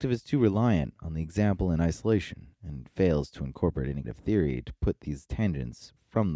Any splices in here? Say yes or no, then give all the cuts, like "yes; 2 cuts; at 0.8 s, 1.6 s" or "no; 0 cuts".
yes; 2 cuts; at 2.5 s, 4.0 s